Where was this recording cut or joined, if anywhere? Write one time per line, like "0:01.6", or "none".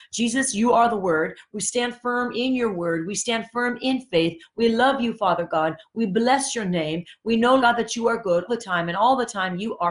0:07.6
0:08.5